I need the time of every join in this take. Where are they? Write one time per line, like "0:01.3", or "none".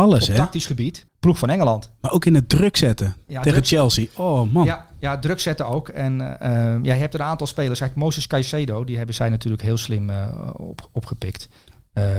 0:01.1